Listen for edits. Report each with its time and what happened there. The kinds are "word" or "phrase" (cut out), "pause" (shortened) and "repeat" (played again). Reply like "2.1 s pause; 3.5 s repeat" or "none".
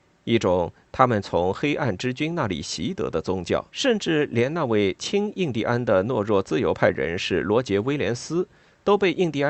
3.7 s pause